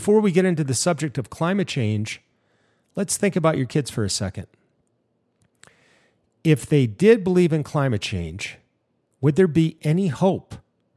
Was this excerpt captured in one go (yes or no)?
yes